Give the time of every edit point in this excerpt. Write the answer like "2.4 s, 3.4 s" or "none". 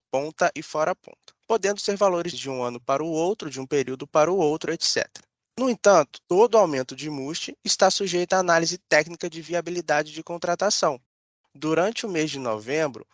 2.3 s, 6.2 s